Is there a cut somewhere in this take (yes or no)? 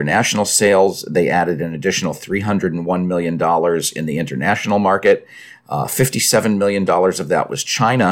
no